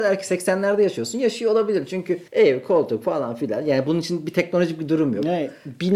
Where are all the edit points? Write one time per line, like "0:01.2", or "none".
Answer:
0:02.3